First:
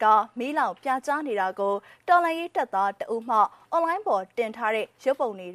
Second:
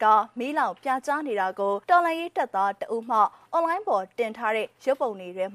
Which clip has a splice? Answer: second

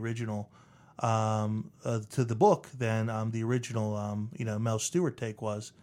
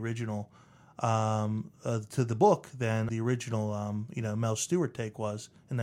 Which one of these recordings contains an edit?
second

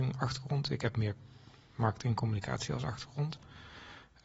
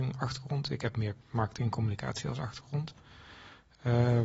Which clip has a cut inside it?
second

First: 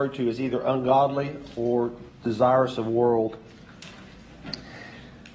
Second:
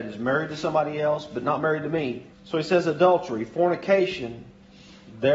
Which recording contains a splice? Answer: second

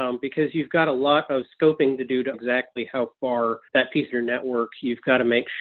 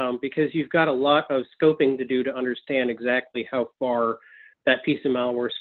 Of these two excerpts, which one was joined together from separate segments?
first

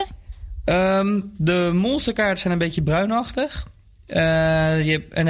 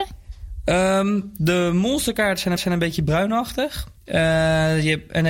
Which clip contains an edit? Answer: second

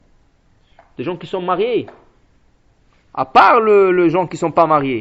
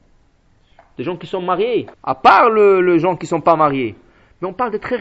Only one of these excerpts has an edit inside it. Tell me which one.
second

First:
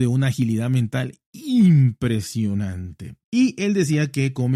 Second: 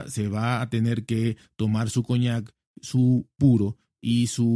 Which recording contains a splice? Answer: first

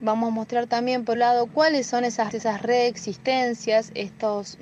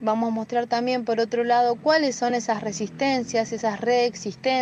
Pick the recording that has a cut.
first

